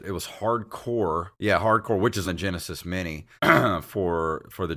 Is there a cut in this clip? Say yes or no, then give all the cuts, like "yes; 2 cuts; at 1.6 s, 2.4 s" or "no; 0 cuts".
yes; 3 cuts; at 1.3 s, 2.2 s, 3.4 s